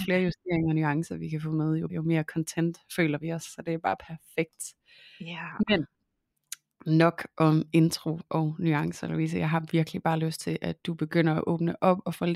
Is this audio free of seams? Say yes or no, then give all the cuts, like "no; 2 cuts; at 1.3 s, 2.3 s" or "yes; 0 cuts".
no; 1 cut; at 1.9 s